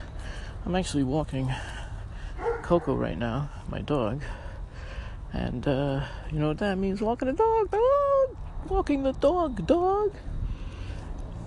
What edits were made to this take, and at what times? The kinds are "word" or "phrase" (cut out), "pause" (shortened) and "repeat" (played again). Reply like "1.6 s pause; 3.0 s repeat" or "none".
none